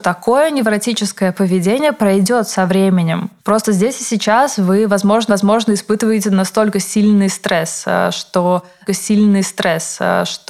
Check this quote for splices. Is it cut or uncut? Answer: cut